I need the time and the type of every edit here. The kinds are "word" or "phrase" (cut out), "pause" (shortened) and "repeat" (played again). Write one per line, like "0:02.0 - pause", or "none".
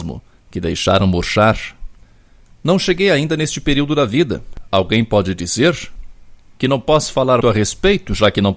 0:07.4 - word